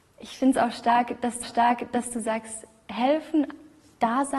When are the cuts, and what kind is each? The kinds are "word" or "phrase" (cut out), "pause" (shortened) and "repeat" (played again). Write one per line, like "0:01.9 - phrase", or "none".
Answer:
0:01.4 - repeat